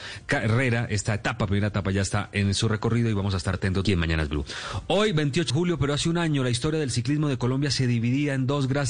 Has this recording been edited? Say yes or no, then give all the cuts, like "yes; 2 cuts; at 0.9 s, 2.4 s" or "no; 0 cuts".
yes; 3 cuts; at 3.5 s, 3.8 s, 5.5 s